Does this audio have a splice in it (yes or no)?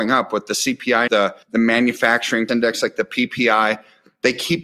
yes